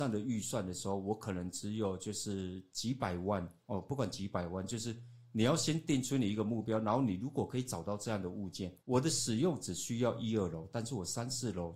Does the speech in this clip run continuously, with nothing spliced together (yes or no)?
no